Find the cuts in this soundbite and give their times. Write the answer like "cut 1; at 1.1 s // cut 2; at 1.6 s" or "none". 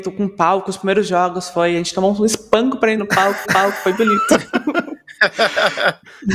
cut 1; at 3.0 s // cut 2; at 3.4 s